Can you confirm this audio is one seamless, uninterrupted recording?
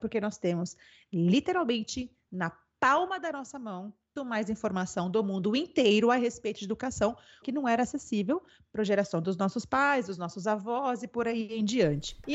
no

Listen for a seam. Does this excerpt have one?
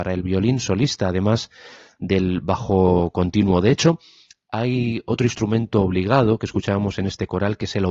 no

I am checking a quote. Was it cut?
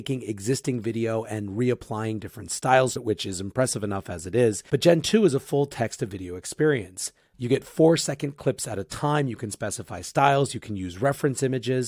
yes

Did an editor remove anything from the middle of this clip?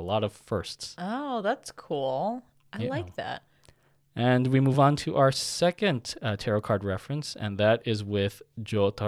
no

